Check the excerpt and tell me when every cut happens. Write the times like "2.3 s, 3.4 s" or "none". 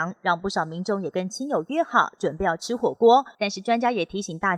3.3 s